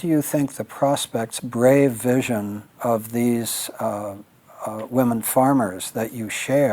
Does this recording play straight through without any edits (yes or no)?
no